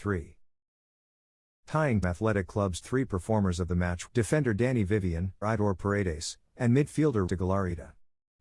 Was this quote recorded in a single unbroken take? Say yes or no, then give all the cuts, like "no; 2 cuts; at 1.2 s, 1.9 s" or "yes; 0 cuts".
no; 5 cuts; at 2.0 s, 2.8 s, 4.1 s, 5.4 s, 7.3 s